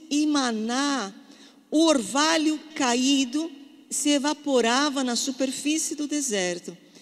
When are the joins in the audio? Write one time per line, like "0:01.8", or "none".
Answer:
0:02.7